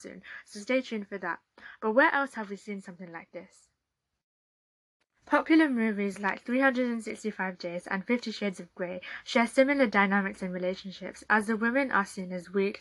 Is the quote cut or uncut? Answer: uncut